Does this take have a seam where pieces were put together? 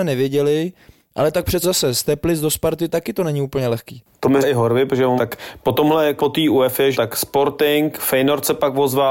yes; 5 cuts; at 1.6 s, 4.4 s, 5.2 s, 6.2 s, 6.9 s

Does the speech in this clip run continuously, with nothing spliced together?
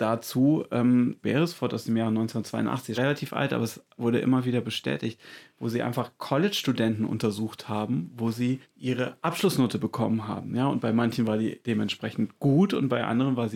no; 3 cuts; at 1.2 s, 2.9 s, 8.6 s

